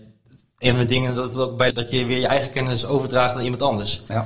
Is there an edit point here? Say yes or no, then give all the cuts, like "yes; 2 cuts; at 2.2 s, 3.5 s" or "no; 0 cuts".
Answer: yes; 1 cut; at 1.7 s